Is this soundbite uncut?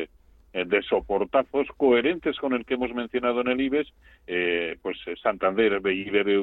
yes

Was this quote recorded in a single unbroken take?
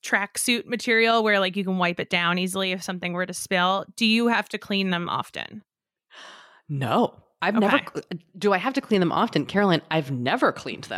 yes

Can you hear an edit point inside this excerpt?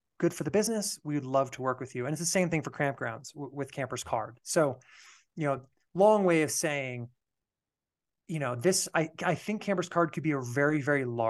no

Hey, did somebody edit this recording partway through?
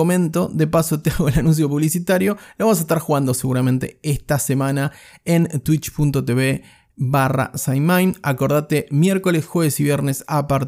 no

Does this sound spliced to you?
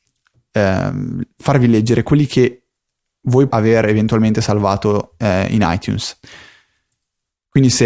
yes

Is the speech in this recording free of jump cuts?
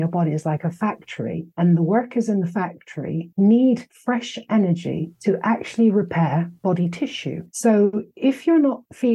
no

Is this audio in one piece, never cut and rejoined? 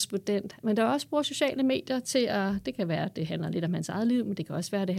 yes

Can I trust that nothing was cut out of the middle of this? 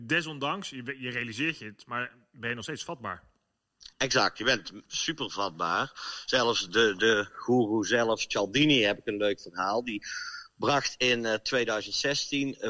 yes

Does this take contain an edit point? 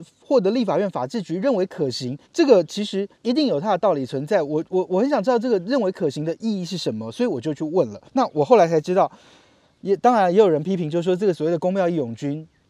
yes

